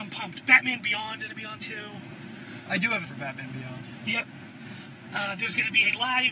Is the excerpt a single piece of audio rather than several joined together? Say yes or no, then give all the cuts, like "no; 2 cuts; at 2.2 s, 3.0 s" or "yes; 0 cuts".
no; 3 cuts; at 1.3 s, 1.6 s, 3.0 s